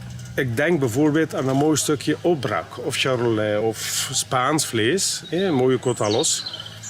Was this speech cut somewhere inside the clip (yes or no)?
no